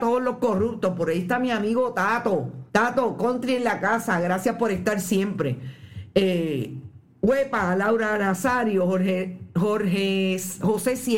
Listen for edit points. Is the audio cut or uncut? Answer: cut